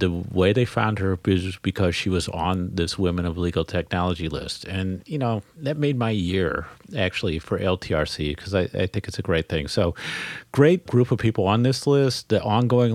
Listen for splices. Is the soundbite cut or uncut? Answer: uncut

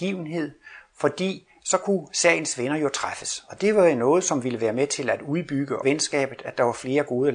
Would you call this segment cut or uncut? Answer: cut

